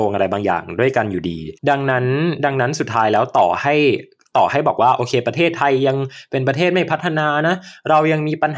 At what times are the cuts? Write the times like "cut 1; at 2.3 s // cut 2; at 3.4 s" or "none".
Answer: cut 1; at 1.6 s